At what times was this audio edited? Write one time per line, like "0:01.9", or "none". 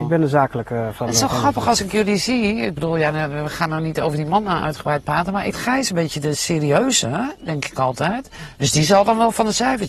0:05.5